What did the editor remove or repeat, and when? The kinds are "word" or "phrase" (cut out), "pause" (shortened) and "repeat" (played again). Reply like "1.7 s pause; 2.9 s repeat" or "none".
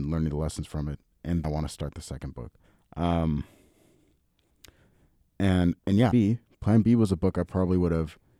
1.4 s word; 2.6 s pause; 5.8 s pause; 6.1 s phrase